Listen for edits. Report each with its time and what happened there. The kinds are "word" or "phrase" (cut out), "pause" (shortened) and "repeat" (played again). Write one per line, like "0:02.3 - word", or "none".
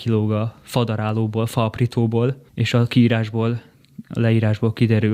0:02.5 - pause